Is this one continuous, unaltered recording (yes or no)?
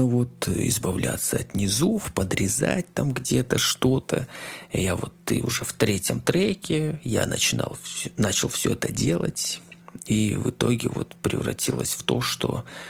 yes